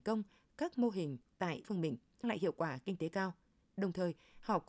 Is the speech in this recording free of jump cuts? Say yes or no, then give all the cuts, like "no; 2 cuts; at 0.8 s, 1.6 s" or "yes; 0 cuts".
no; 2 cuts; at 1.6 s, 2.2 s